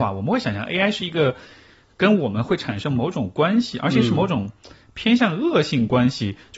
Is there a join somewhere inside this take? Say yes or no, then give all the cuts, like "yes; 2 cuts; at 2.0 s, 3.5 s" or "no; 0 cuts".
no; 0 cuts